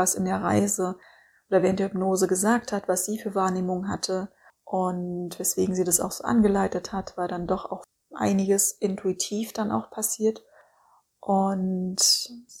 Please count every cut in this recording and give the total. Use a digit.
0